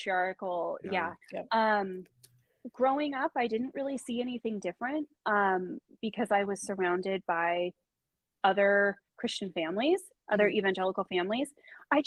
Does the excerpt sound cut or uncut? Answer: cut